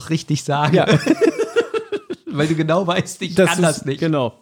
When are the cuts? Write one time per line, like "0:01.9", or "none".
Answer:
none